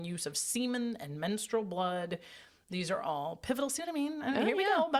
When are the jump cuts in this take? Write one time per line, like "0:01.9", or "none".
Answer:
none